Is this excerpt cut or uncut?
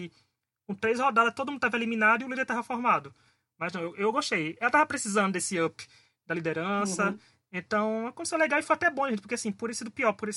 uncut